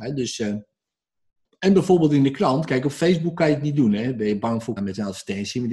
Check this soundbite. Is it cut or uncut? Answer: cut